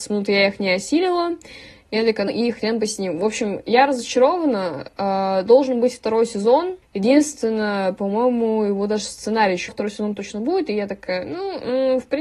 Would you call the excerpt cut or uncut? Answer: cut